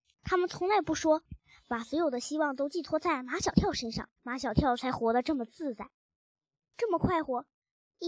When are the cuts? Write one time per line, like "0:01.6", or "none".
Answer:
0:04.2